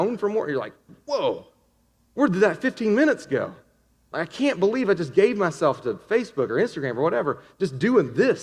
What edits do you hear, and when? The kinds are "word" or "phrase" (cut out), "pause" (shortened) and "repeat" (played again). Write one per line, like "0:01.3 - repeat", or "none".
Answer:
none